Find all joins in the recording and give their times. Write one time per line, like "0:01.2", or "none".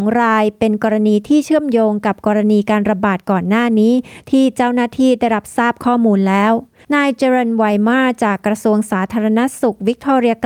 0:06.8